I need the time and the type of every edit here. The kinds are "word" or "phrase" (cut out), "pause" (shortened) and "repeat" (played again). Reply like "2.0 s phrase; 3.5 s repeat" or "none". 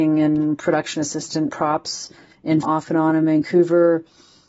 1.5 s word; 2.6 s word